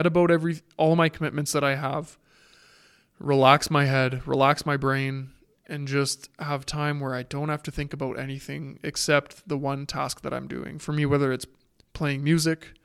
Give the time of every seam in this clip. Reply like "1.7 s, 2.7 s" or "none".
none